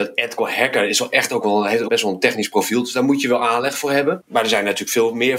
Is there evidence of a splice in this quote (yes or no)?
yes